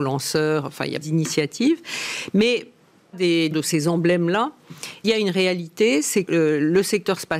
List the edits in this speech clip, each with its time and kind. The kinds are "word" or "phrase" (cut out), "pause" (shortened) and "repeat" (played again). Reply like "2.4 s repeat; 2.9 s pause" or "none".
1.0 s word; 3.1 s word; 3.5 s word; 5.0 s word; 6.3 s word